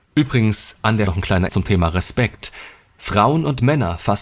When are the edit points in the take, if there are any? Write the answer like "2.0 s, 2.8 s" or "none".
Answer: 1.1 s, 1.5 s